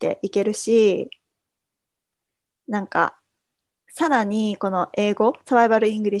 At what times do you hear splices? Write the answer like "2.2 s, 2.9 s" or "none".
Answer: none